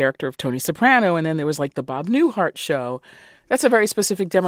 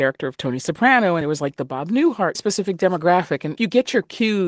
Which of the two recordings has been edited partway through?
second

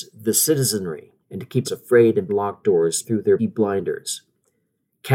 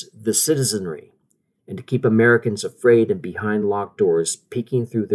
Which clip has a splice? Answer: first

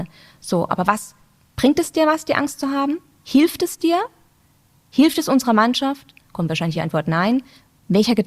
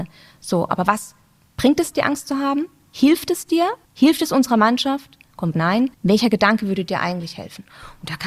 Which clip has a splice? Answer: second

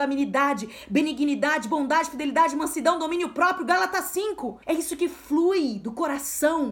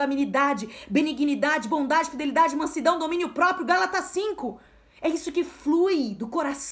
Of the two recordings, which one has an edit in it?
first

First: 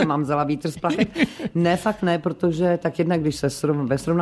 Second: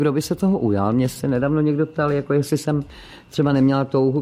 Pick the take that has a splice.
second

